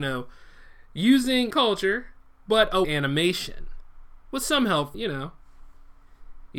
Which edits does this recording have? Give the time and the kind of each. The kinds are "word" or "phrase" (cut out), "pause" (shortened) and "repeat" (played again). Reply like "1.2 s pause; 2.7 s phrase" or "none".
1.5 s word; 2.8 s word; 4.9 s word

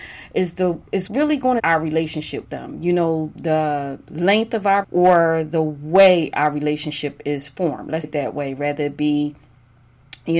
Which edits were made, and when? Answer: 1.1 s word; 1.6 s phrase; 2.4 s word; 3.3 s word; 4.8 s word; 8.0 s word

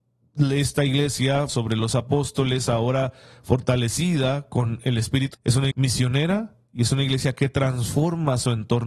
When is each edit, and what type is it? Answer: 1.5 s word; 5.3 s word; 5.7 s word

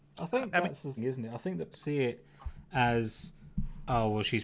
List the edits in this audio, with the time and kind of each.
1.0 s word; 1.7 s word

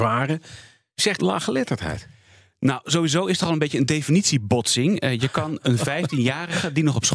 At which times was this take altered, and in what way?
1.2 s phrase

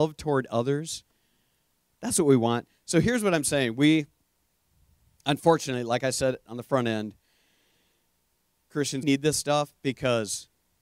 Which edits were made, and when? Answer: 9.0 s word

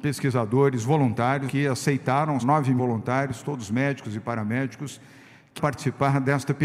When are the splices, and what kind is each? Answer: 1.5 s word; 2.4 s word; 2.8 s word; 5.6 s word

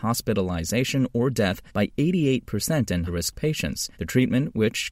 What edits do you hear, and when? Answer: 1.7 s pause; 3.1 s word; 3.9 s pause

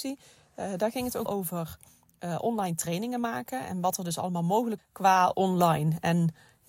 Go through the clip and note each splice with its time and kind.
1.3 s word; 4.8 s word

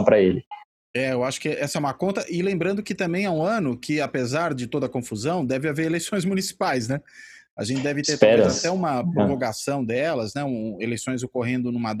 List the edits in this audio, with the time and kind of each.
none

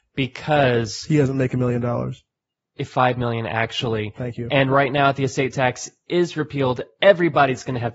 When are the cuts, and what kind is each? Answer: none

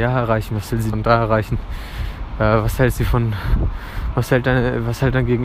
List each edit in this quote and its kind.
0.9 s word

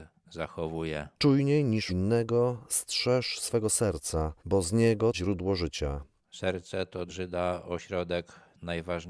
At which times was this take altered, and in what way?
1.2 s pause; 1.9 s word; 4.4 s pause; 5.1 s word; 7.1 s word

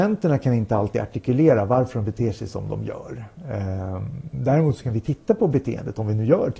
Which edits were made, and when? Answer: none

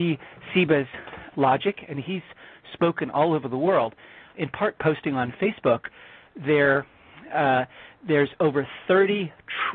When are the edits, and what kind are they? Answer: 1.3 s word; 4.3 s word; 4.8 s phrase

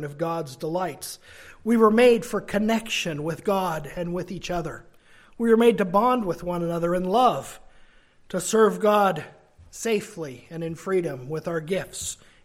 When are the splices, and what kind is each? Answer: none

